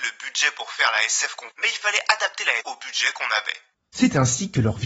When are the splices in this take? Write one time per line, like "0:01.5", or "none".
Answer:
0:01.5
0:02.6